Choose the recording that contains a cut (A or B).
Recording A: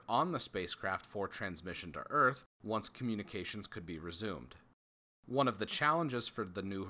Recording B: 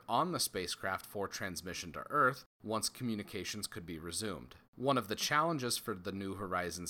B